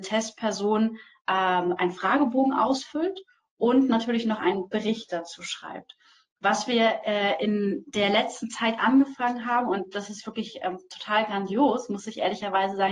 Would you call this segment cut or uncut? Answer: uncut